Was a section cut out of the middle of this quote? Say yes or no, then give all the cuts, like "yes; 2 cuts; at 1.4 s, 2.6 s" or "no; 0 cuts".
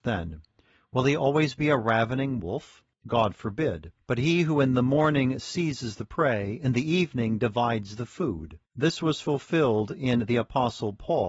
yes; 3 cuts; at 2.9 s, 4.0 s, 8.7 s